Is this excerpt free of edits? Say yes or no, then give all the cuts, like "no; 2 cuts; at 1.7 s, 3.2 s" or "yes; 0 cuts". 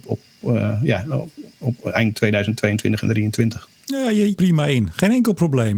no; 1 cut; at 4.3 s